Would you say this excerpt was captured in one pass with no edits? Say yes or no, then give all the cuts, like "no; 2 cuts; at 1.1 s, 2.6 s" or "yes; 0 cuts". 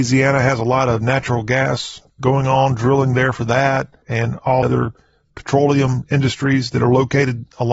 no; 3 cuts; at 2.1 s, 4.0 s, 4.6 s